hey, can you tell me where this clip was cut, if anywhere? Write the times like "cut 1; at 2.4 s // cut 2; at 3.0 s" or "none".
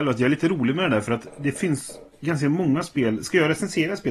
none